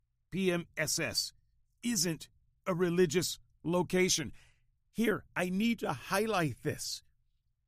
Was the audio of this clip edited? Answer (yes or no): no